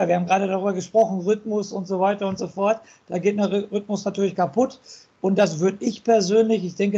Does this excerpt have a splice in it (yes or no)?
no